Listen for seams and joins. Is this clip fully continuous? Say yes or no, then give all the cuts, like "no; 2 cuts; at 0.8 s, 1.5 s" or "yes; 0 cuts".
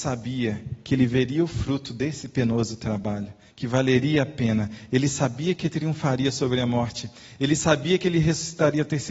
no; 1 cut; at 3.5 s